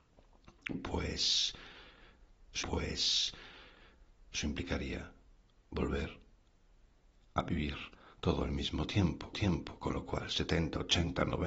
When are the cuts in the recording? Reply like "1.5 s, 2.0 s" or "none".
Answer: 2.6 s, 9.3 s